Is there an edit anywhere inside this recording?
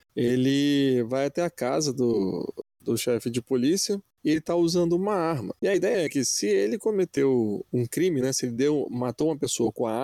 no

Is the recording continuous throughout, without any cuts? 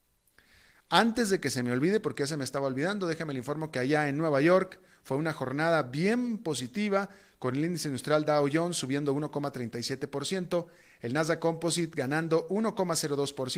yes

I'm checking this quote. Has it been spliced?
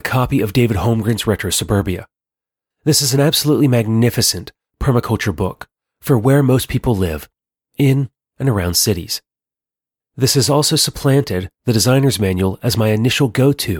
no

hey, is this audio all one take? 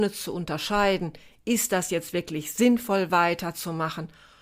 yes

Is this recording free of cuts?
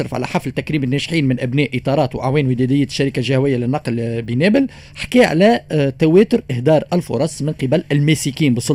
no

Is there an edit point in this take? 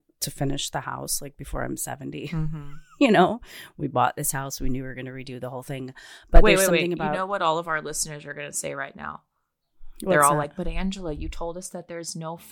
no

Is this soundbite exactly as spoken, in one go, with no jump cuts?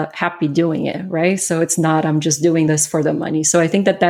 yes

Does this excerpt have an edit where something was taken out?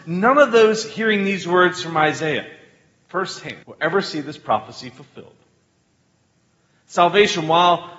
yes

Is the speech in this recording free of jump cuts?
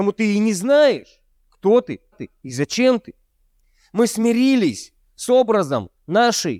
no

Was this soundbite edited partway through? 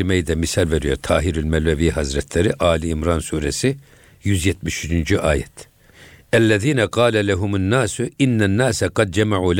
no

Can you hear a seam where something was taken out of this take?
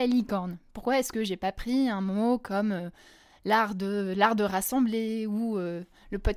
no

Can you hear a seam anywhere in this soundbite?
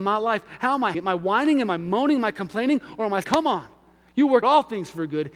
yes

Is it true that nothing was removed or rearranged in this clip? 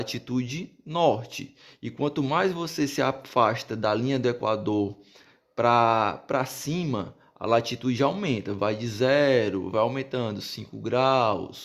yes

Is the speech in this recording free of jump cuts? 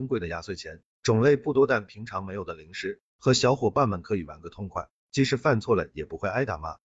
yes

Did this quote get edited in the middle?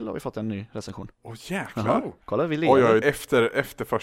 yes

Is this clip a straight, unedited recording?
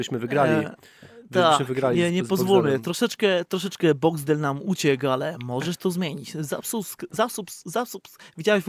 yes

